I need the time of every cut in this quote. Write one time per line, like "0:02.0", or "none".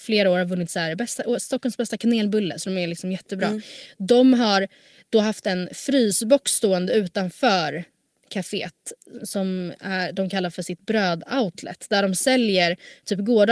none